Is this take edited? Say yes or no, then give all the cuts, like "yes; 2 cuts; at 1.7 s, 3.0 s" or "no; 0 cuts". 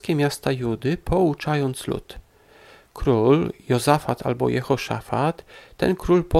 no; 0 cuts